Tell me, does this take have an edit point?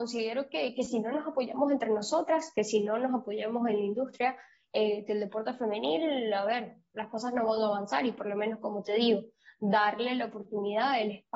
no; 0 cuts

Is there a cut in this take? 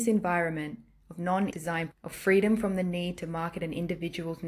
yes; 2 cuts; at 1.5 s, 1.9 s

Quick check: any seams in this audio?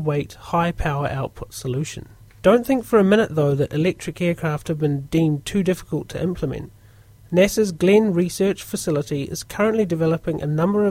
yes; 1 cut; at 2.3 s

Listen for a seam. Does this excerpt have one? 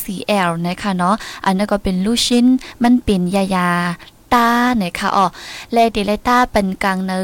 no; 0 cuts

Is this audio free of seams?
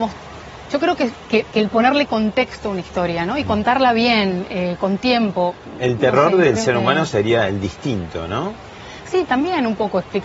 yes; 0 cuts

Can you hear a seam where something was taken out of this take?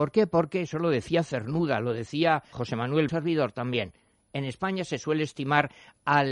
yes; 2 cuts; at 2.5 s, 3.1 s

